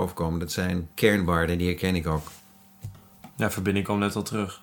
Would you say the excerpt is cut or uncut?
cut